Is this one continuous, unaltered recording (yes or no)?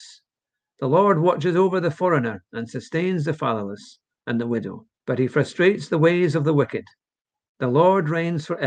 no